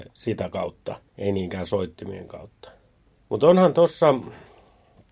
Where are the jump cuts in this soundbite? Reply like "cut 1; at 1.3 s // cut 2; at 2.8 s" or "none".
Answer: cut 1; at 1.1 s // cut 2; at 3.1 s